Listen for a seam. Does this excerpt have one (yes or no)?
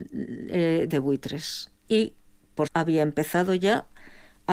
yes